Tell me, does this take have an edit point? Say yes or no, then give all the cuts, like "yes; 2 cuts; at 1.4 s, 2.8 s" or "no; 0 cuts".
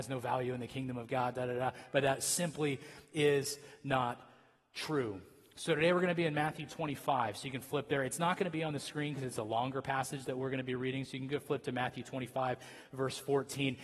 no; 0 cuts